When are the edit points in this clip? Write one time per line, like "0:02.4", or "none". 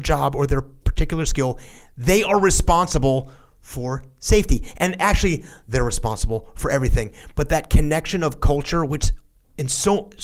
none